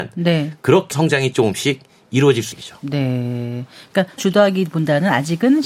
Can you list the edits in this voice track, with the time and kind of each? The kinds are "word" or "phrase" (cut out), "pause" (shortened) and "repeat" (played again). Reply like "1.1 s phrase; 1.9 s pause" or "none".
0.9 s word; 1.3 s word; 2.5 s word; 4.2 s word